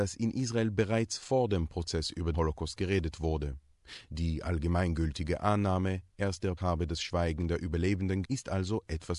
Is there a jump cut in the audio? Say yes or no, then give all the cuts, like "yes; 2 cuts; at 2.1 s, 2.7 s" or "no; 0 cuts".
yes; 3 cuts; at 2.3 s, 6.6 s, 8.2 s